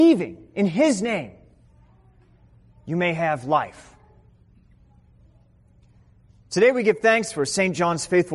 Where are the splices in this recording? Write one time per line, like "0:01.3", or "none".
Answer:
none